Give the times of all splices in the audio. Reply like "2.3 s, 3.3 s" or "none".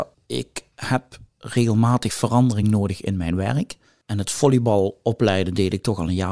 none